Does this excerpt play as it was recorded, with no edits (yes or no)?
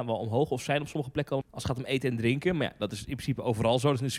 no